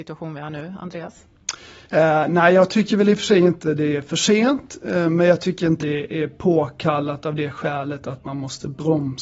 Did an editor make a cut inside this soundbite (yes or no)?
yes